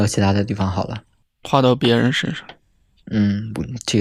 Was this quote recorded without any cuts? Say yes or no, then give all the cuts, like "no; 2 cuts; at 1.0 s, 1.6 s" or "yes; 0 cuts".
yes; 0 cuts